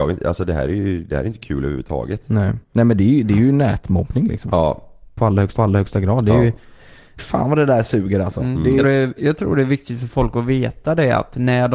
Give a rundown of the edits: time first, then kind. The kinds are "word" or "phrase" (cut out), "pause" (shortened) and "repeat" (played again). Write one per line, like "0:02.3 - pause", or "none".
0:02.6 - pause
0:05.6 - repeat
0:07.2 - word
0:08.8 - word
0:09.2 - word